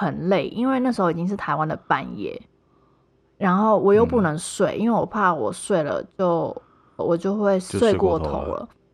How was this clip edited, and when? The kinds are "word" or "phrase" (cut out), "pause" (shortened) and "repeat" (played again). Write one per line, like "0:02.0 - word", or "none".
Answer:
0:07.0 - word